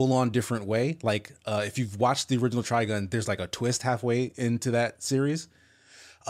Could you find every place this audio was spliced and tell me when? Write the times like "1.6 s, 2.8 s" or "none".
none